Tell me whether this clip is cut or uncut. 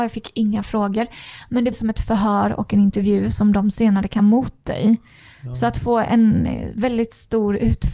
cut